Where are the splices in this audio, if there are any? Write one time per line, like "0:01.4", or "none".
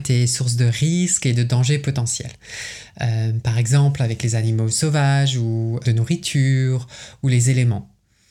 0:05.8